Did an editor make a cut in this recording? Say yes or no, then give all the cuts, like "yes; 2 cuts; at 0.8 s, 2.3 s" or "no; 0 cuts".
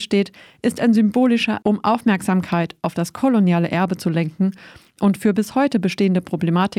yes; 1 cut; at 1.6 s